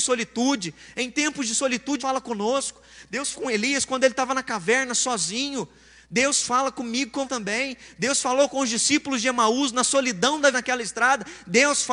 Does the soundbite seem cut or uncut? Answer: cut